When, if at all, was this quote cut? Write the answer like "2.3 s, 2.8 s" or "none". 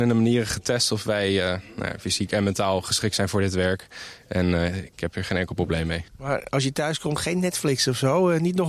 6.1 s